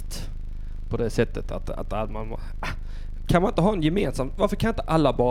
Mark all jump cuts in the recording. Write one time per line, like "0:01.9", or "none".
none

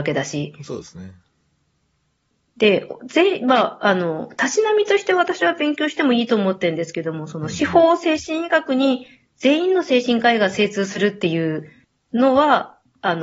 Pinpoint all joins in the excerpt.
0:11.8

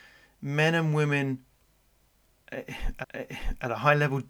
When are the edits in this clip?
0:03.0

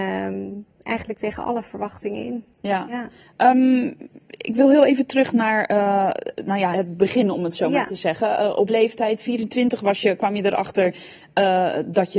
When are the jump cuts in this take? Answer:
0:06.7
0:08.7

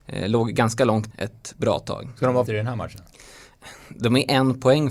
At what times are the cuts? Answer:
0:01.1
0:02.5

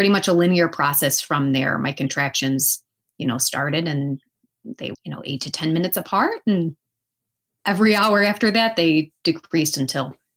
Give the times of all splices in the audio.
0:04.9

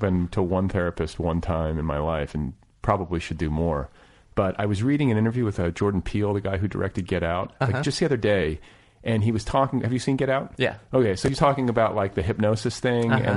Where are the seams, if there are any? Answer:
none

